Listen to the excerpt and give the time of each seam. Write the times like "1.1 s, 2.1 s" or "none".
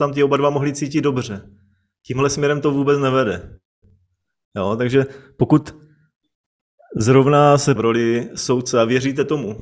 7.8 s